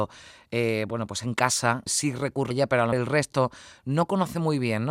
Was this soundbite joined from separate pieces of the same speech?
yes; 3 cuts; at 1.9 s, 2.5 s, 2.9 s

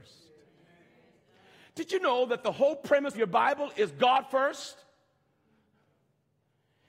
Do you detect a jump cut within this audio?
yes; 1 cut; at 3.1 s

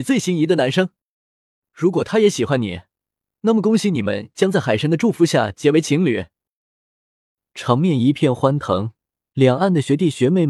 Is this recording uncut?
yes; 0 cuts

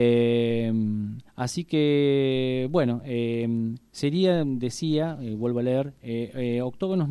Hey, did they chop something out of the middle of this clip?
yes; 1 cut; at 1.3 s

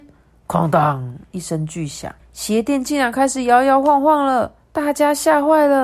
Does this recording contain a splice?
yes; 2 cuts; at 2.2 s, 4.6 s

